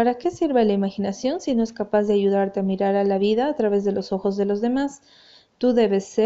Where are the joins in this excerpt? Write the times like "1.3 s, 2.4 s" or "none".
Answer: none

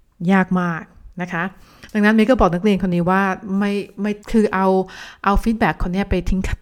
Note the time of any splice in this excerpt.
1.1 s, 4.2 s

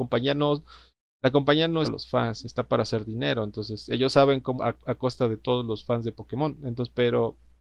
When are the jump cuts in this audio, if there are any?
1.8 s, 4.6 s

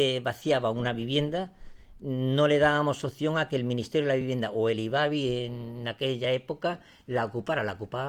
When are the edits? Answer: none

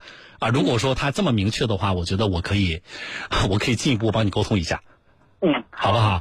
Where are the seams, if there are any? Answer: none

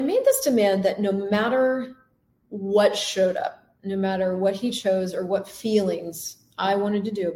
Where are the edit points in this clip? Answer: none

